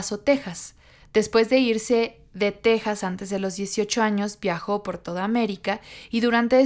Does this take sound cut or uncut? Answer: uncut